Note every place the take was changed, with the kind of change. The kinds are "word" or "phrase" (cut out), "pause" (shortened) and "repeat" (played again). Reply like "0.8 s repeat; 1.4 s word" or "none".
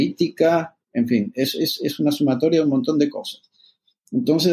none

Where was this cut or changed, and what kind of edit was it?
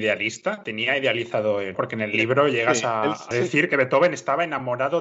1.7 s word; 3.3 s word

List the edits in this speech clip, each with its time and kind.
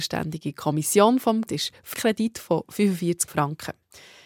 1.5 s word; 1.9 s word; 3.3 s word

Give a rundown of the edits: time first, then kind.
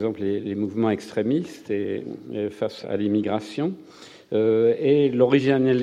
2.8 s word

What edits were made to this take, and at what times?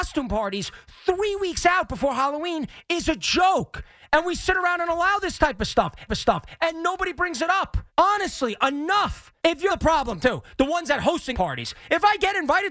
6.1 s repeat; 7.9 s pause; 9.4 s pause; 9.7 s phrase; 11.3 s word

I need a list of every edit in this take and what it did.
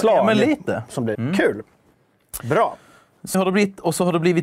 1.1 s word; 3.3 s word

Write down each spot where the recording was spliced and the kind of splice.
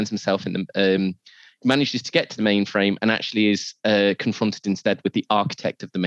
none

